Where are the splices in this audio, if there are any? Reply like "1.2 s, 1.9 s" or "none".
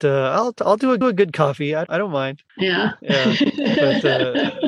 1.0 s, 1.9 s, 2.5 s

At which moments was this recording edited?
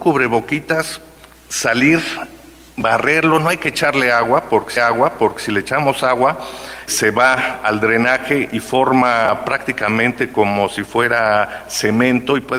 4.8 s, 6.9 s

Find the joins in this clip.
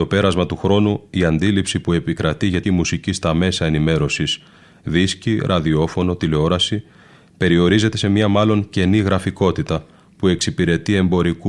2.6 s

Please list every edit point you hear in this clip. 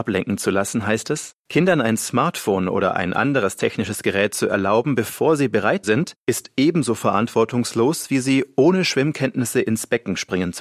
1.4 s, 5.8 s, 6.2 s

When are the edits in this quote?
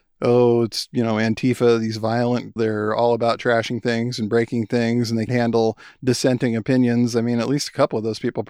2.6 s, 5.3 s

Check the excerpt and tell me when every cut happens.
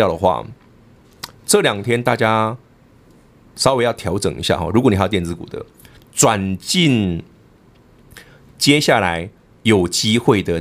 none

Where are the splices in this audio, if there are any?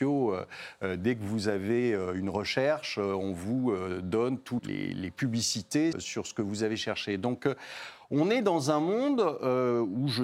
4.6 s, 5.9 s

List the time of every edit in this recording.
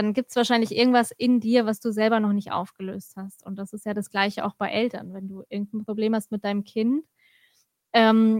none

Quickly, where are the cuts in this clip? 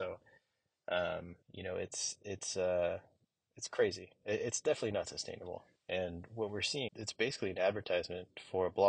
1.4 s, 3.2 s, 6.9 s

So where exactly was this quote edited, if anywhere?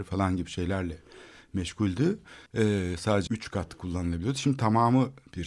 2.5 s, 3.3 s

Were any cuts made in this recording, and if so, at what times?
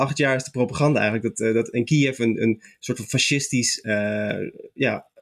none

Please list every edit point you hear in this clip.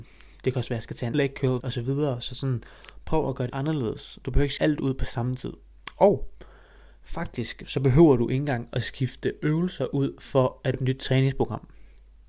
1.1 s, 1.6 s, 3.5 s, 4.6 s, 10.7 s

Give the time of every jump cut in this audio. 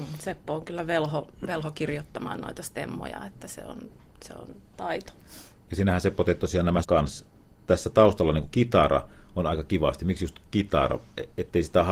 4.7 s, 6.8 s, 8.5 s

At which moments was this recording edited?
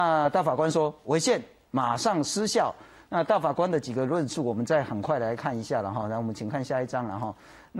none

